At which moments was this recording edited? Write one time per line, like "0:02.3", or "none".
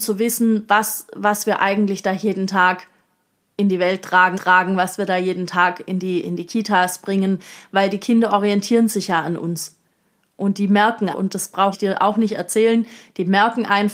0:04.3
0:11.1
0:11.7